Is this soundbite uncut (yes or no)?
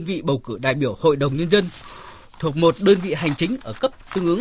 yes